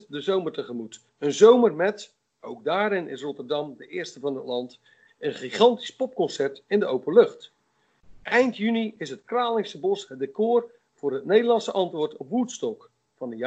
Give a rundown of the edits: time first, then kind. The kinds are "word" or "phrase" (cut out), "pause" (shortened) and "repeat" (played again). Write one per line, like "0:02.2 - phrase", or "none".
0:01.1 - pause